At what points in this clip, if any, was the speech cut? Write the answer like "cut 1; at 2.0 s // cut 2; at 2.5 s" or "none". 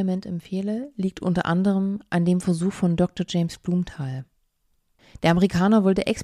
none